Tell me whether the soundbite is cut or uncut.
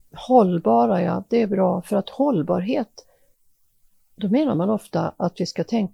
uncut